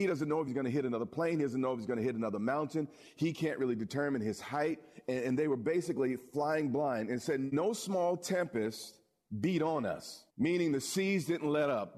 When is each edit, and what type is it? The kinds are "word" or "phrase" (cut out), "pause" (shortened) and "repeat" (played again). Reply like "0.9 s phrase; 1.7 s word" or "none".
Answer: 10.3 s pause